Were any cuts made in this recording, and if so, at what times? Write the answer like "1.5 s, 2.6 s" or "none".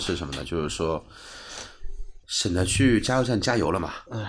2.2 s